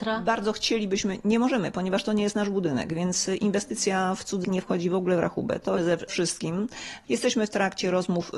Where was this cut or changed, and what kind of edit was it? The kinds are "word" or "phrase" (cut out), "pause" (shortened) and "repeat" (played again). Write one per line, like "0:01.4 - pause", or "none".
0:04.4 - word
0:05.8 - phrase